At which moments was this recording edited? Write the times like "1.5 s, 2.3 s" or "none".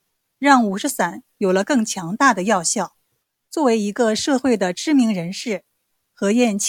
3.2 s